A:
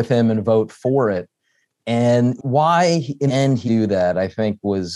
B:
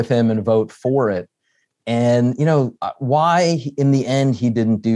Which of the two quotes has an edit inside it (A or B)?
A